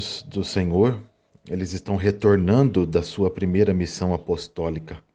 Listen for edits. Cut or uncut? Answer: uncut